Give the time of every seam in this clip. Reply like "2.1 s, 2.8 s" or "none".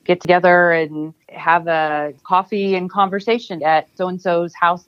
1.2 s, 3.6 s